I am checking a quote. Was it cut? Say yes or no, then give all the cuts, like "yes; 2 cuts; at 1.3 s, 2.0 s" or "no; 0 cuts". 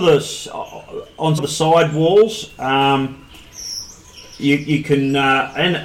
yes; 1 cut; at 1.4 s